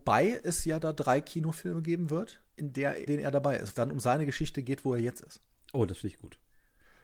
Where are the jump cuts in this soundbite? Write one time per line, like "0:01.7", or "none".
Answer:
0:02.5
0:03.1
0:03.7